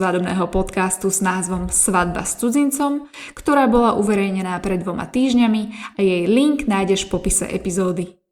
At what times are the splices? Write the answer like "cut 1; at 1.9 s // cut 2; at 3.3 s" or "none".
none